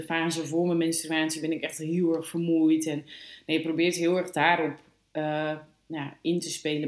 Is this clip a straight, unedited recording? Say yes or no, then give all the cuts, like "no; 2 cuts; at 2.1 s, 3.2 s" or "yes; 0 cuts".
yes; 0 cuts